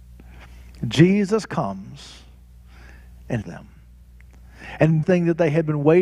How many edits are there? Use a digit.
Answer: 2